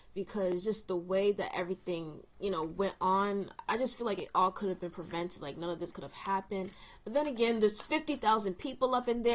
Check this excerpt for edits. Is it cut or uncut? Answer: uncut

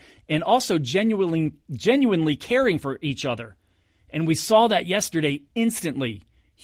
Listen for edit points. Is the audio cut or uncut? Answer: uncut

